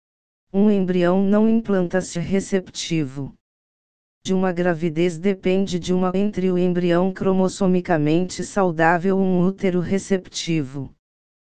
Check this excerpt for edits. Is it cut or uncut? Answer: cut